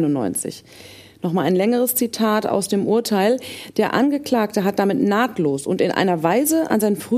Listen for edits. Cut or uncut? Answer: uncut